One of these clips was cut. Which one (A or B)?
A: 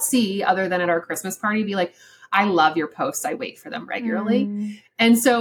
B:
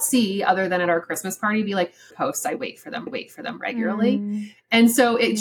B